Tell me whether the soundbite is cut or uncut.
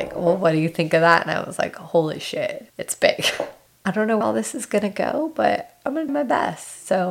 cut